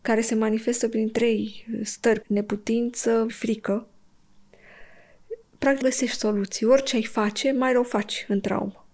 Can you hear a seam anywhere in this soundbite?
yes; 3 cuts; at 2.2 s, 3.3 s, 5.8 s

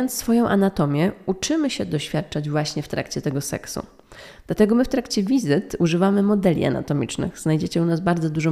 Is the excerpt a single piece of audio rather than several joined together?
yes; 0 cuts

